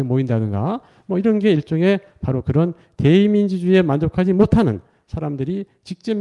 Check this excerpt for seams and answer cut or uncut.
uncut